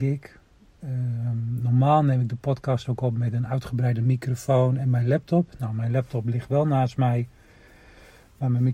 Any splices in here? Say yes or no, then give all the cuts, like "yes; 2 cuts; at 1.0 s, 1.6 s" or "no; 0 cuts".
no; 0 cuts